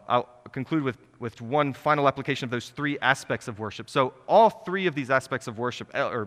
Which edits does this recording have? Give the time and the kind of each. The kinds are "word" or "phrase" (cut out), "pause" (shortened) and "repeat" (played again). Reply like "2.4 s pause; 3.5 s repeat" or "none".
1.4 s word